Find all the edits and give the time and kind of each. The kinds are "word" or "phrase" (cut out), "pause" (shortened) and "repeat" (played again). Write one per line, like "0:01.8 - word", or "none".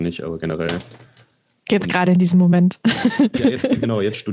none